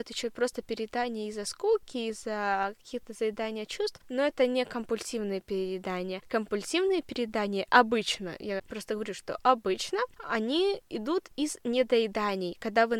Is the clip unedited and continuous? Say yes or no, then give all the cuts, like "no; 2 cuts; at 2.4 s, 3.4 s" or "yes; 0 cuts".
yes; 0 cuts